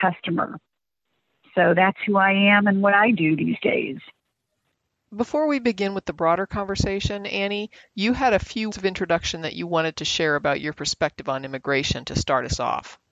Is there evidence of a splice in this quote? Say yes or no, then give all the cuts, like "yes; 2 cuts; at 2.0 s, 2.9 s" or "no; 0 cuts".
yes; 1 cut; at 8.7 s